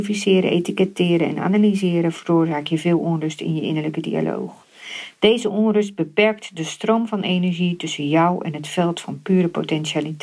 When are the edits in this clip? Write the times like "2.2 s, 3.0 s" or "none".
none